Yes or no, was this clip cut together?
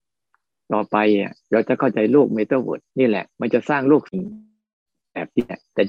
yes